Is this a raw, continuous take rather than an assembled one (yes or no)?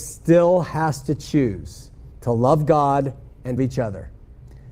no